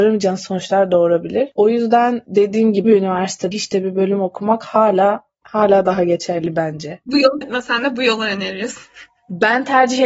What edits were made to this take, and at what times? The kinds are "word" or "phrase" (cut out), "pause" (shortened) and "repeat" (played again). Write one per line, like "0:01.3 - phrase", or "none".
0:02.8 - word
0:03.5 - word
0:05.4 - word
0:07.4 - word